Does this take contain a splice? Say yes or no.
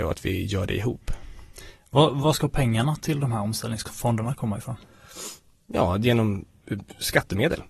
no